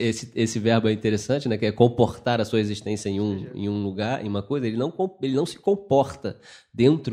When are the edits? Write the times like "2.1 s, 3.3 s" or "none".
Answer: none